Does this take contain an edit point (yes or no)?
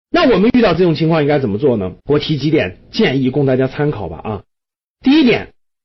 yes